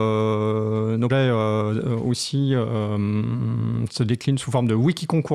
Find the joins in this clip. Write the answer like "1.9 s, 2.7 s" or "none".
1.1 s